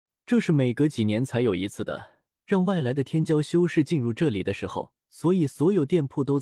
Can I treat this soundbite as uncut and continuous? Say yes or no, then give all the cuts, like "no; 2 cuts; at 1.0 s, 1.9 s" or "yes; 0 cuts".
no; 2 cuts; at 2.3 s, 5.0 s